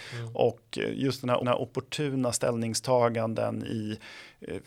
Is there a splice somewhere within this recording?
yes; 1 cut; at 1.4 s

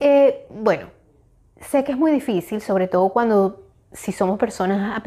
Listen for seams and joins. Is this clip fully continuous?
yes; 0 cuts

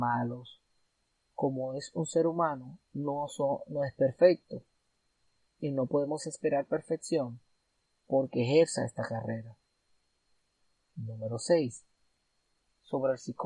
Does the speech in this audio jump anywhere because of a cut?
no; 0 cuts

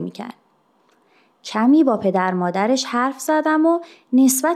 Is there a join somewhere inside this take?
no; 0 cuts

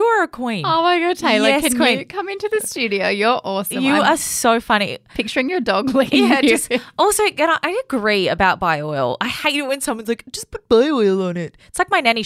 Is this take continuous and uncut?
yes; 0 cuts

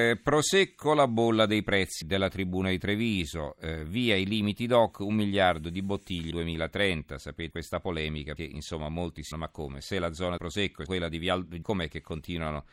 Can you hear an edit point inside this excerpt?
yes; 8 cuts; at 2.0 s, 6.3 s, 7.5 s, 8.4 s, 9.3 s, 10.4 s, 10.9 s, 11.6 s

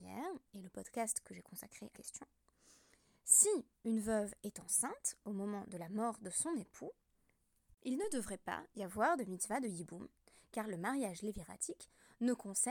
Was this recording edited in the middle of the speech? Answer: yes; 1 cut; at 1.9 s

